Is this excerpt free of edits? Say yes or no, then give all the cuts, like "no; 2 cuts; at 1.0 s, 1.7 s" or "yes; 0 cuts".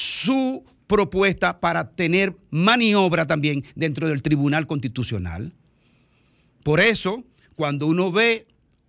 yes; 0 cuts